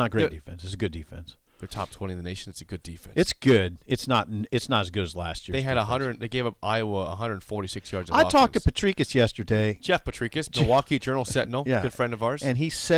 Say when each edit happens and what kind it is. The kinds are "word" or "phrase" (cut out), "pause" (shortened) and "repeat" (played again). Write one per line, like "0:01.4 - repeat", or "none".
0:01.5 - pause